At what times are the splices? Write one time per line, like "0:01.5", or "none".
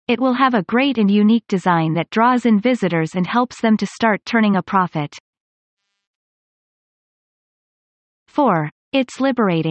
none